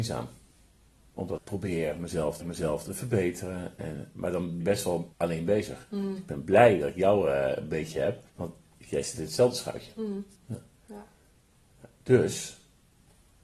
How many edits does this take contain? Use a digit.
6